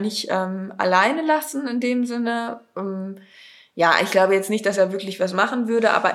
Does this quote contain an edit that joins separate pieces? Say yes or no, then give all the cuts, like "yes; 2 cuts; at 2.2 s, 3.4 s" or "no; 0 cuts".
no; 0 cuts